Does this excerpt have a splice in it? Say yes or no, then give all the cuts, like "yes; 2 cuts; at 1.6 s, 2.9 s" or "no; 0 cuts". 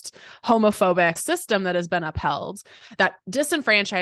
yes; 1 cut; at 1.2 s